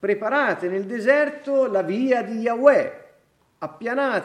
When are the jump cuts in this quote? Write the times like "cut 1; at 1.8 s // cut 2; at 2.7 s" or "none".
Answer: none

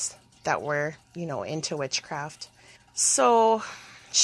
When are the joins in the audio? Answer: cut 1; at 1.0 s // cut 2; at 2.8 s

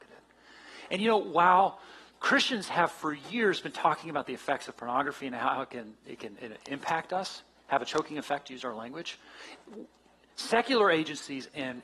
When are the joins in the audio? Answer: none

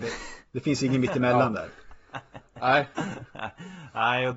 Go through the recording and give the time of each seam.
none

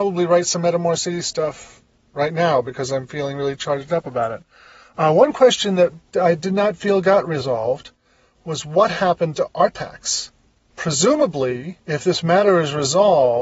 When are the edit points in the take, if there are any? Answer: none

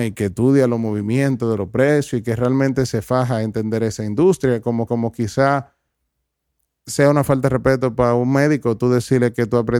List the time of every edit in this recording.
cut 1; at 4.9 s

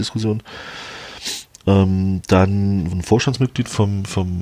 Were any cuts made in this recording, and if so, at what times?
cut 1; at 2.9 s

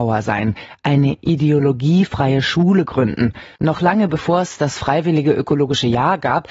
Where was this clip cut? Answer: none

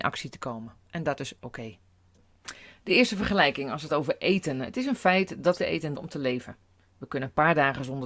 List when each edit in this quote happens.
cut 1; at 3.9 s // cut 2; at 5.6 s // cut 3; at 5.9 s

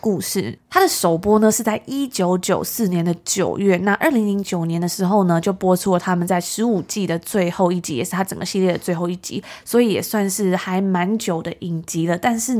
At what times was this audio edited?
none

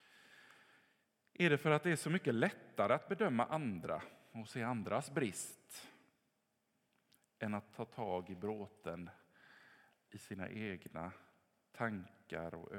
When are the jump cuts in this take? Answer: none

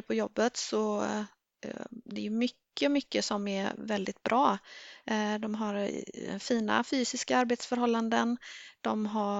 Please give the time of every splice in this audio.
none

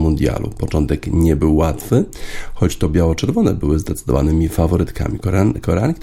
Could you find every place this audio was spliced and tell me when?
none

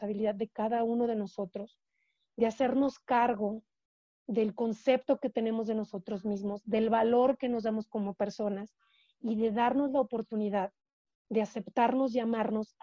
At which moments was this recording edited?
none

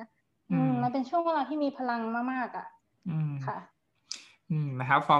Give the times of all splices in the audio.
none

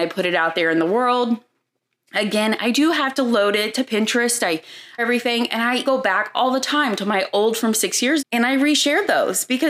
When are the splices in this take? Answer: cut 1; at 5.0 s // cut 2; at 5.9 s // cut 3; at 7.6 s // cut 4; at 8.2 s

